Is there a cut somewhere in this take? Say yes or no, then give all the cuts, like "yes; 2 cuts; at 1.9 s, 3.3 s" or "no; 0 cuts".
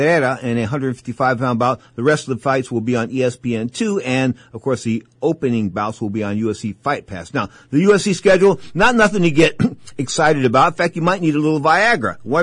no; 0 cuts